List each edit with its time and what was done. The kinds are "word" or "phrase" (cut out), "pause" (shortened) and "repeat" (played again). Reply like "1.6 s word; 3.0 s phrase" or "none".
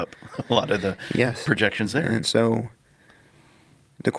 2.2 s word